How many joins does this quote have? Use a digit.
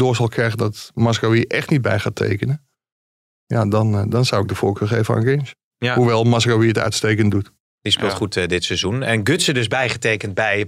0